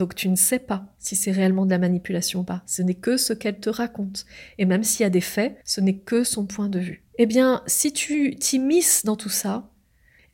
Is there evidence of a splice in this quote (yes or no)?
yes